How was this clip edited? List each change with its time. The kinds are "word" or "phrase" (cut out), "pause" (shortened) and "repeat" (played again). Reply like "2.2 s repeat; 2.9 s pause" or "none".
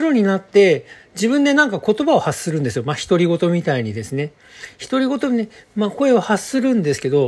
none